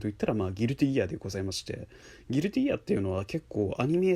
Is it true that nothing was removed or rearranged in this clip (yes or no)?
yes